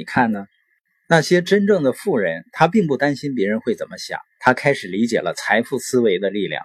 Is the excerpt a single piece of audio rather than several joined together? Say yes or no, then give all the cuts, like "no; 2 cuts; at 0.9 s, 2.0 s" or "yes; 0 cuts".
no; 1 cut; at 4.3 s